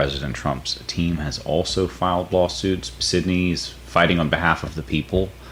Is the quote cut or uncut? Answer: uncut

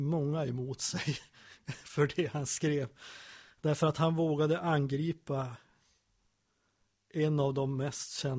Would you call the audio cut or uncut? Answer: uncut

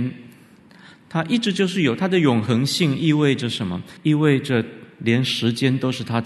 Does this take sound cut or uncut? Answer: cut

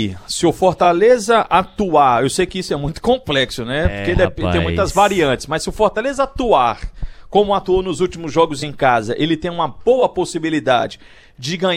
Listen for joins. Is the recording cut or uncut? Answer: uncut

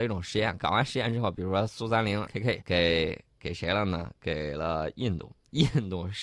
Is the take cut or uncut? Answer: cut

